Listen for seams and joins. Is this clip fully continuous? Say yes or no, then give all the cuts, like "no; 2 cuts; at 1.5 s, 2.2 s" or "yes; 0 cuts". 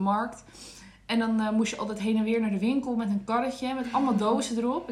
yes; 0 cuts